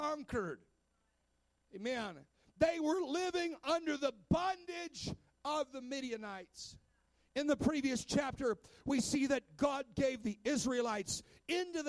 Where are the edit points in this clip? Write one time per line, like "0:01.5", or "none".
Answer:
none

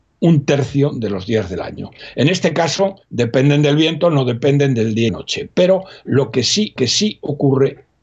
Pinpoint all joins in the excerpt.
0:03.0
0:05.1
0:06.8

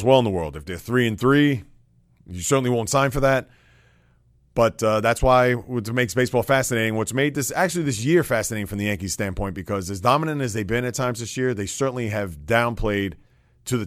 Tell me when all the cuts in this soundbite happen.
none

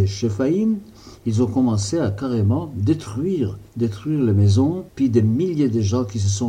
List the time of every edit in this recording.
0:03.7
0:04.9

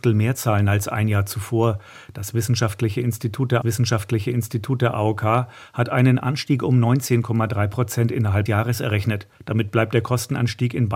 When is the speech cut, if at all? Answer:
0:03.6
0:08.5
0:09.3

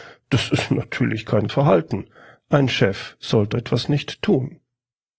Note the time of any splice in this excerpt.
0:01.5
0:03.5

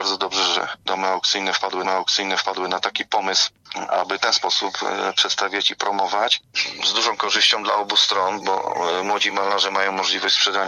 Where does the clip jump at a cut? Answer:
0:01.8
0:04.2
0:08.4

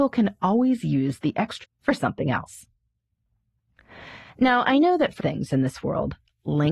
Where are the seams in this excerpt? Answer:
0:01.6
0:05.2

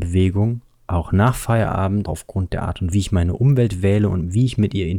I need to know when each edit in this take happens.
0:02.1
0:02.9

